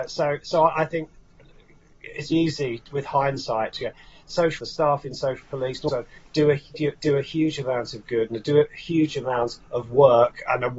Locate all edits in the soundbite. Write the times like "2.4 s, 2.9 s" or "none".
2.3 s, 4.6 s, 5.4 s, 5.9 s